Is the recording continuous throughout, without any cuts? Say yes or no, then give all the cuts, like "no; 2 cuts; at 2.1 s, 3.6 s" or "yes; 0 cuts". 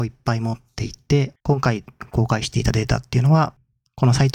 no; 1 cut; at 1.4 s